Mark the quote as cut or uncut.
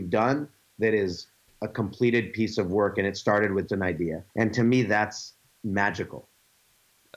cut